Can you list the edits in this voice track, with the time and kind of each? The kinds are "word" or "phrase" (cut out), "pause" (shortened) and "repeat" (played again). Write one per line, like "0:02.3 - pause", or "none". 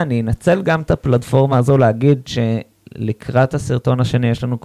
none